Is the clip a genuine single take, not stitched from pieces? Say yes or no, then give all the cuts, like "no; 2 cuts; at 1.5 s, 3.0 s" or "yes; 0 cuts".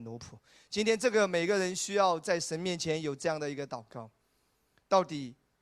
yes; 0 cuts